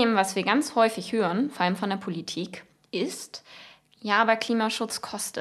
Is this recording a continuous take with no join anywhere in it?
yes; 0 cuts

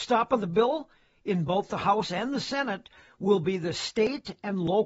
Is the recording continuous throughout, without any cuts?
yes; 0 cuts

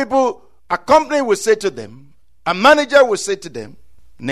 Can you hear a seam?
no; 0 cuts

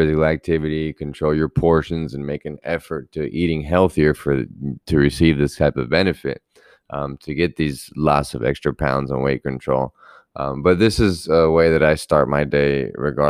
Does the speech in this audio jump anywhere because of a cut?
no; 0 cuts

